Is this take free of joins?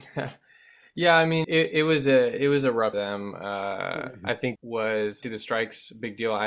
no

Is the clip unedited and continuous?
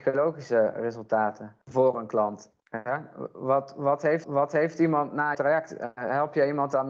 no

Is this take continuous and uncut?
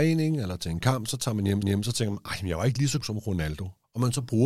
no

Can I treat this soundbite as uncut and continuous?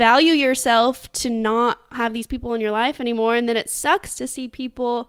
yes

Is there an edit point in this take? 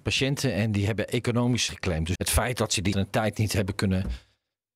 yes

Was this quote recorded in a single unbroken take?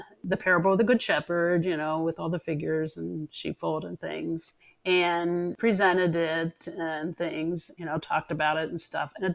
no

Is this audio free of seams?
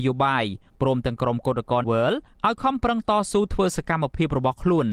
no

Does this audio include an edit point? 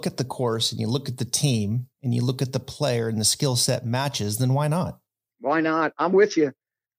yes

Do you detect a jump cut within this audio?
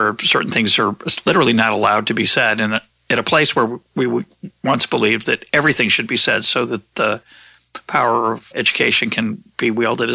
yes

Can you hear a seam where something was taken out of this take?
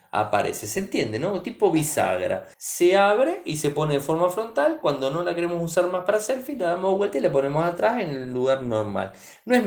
yes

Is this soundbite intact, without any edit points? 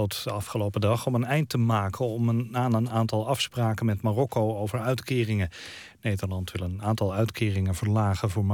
yes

